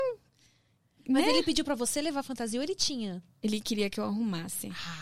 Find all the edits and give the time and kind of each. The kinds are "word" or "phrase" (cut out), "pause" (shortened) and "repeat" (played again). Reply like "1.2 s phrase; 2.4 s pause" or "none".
none